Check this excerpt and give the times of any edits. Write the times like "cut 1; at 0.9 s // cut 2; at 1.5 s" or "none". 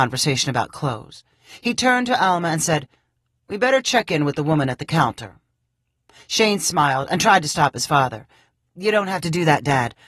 none